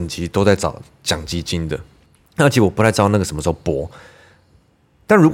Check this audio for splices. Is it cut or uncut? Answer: uncut